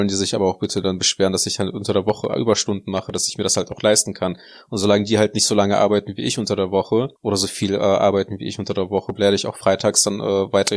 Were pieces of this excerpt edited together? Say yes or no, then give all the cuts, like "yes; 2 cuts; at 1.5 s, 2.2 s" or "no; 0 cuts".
yes; 1 cut; at 7.2 s